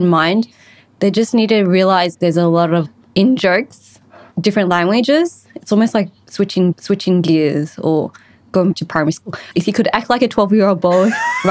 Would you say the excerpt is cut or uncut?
cut